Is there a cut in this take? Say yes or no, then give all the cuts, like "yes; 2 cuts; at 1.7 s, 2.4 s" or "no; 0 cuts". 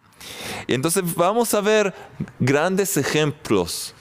no; 0 cuts